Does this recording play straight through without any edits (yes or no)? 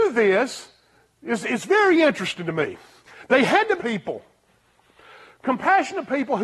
no